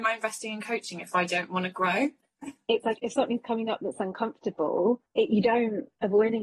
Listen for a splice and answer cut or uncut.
uncut